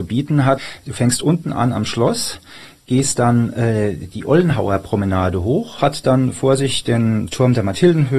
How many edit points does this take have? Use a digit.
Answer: 0